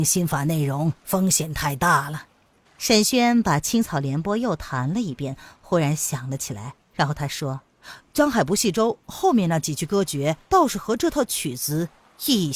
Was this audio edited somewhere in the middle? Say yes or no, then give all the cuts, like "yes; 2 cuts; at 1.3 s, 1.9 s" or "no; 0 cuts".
yes; 5 cuts; at 1.0 s, 2.6 s, 6.8 s, 7.6 s, 10.5 s